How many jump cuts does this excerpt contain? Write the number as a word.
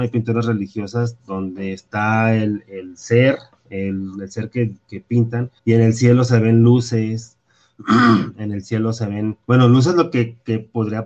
three